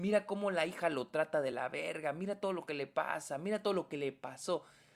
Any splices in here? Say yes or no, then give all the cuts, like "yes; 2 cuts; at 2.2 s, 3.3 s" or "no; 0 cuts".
no; 0 cuts